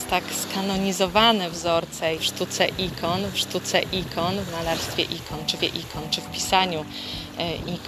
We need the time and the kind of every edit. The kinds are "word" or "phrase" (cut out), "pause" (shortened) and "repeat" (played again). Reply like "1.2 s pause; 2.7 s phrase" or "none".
2.2 s word; 3.3 s repeat; 5.6 s repeat